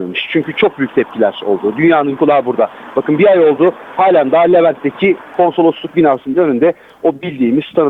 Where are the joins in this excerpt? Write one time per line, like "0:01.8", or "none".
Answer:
0:02.2